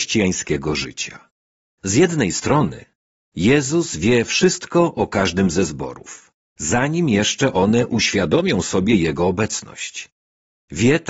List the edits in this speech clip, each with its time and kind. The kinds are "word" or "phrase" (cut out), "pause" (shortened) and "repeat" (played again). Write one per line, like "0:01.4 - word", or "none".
none